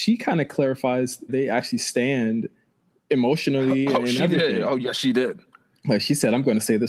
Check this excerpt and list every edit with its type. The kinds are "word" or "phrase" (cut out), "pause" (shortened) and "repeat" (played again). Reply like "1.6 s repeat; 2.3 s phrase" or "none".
1.3 s word